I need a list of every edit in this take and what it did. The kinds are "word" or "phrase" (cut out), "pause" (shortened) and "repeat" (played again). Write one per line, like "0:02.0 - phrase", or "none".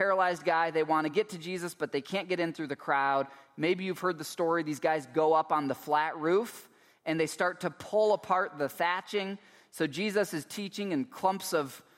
none